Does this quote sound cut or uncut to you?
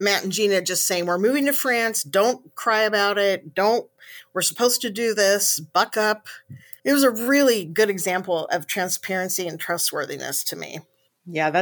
cut